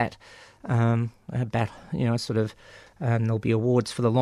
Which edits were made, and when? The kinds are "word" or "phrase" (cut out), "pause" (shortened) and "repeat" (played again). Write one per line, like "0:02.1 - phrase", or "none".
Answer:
none